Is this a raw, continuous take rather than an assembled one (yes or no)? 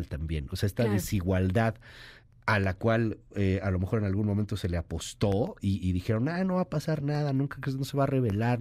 yes